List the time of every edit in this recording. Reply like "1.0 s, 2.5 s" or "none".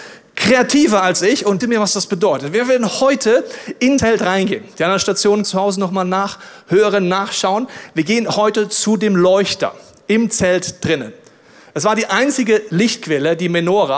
1.6 s, 4.0 s, 5.4 s

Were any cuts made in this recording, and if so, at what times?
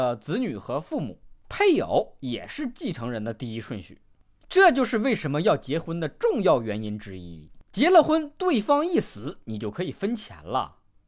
1.4 s

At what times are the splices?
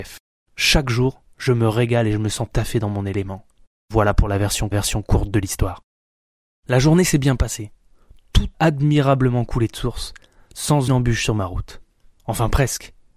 2.5 s, 4.7 s, 8.5 s, 10.9 s

